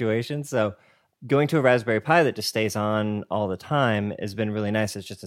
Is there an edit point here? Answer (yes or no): no